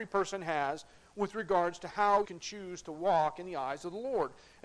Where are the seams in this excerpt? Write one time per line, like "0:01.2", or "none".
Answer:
0:02.2